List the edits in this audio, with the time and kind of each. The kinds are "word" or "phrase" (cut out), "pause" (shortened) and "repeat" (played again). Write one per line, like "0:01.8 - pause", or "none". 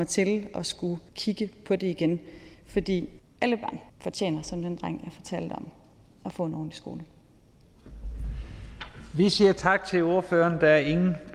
0:01.1 - pause
0:03.2 - pause
0:03.9 - pause